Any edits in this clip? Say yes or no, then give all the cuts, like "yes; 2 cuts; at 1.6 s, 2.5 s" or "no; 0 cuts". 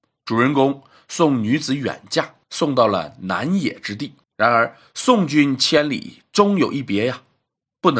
yes; 2 cuts; at 2.4 s, 4.2 s